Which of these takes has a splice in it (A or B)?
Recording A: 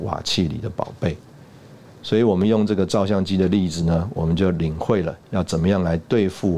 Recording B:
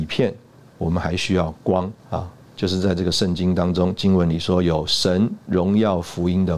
B